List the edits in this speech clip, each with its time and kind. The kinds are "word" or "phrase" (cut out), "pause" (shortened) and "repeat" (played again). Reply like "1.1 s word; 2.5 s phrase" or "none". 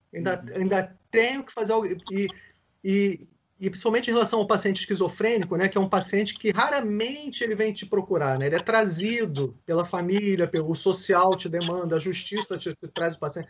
9.6 s pause